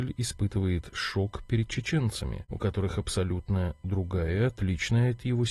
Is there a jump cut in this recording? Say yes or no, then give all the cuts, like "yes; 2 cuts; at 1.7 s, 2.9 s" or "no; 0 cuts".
no; 0 cuts